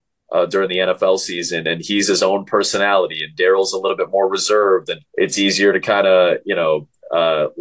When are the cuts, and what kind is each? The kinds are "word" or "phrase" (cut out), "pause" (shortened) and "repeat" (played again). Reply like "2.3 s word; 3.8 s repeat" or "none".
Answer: 5.0 s pause